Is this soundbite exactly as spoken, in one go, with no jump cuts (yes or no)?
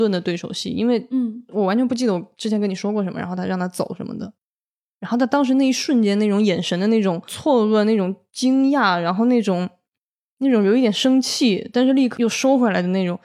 yes